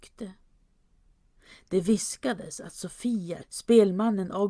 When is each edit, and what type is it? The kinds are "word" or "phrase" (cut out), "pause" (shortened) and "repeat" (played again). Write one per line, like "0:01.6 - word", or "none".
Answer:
0:03.4 - word